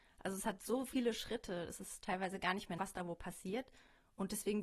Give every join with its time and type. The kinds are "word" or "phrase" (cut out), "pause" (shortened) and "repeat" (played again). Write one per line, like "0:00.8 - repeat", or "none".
0:02.8 - word

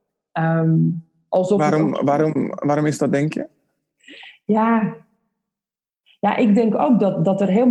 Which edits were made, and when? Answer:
none

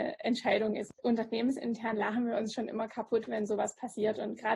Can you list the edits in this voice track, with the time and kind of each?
0:01.0 - pause

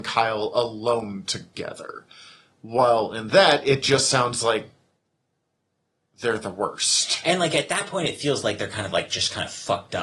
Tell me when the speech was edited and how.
none

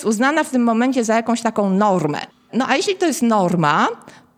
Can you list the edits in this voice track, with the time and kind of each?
0:02.3 - pause

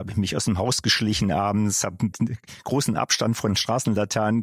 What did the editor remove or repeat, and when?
0:02.1 - word

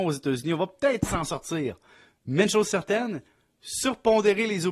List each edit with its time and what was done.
none

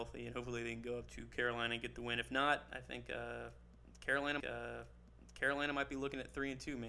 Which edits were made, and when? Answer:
0:01.1 - word
0:04.4 - repeat

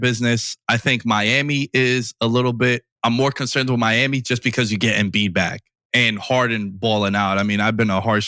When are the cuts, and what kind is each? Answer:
0:02.9 - pause
0:05.8 - pause

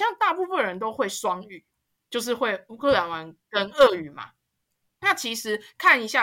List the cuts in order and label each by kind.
none

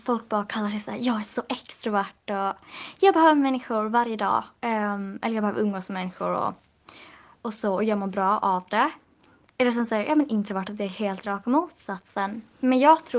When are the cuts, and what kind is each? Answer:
none

